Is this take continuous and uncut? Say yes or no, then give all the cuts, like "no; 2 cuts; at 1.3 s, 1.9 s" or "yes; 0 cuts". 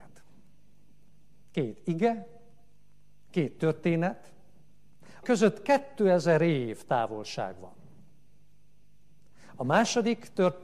no; 1 cut; at 5.2 s